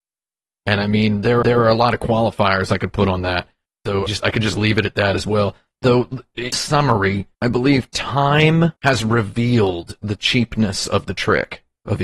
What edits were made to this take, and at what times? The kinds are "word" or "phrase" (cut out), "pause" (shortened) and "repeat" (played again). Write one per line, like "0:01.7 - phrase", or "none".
0:01.4 - repeat
0:04.1 - phrase
0:06.5 - word
0:07.3 - pause
0:08.8 - pause